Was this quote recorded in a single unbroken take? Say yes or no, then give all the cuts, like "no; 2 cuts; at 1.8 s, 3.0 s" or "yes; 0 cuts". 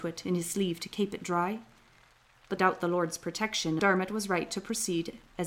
no; 2 cuts; at 2.6 s, 3.8 s